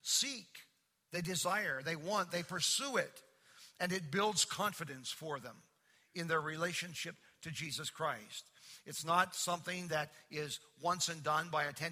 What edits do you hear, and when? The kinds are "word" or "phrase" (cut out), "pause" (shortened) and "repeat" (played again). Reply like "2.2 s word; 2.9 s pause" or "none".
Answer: none